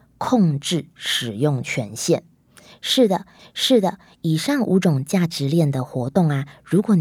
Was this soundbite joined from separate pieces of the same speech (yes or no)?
yes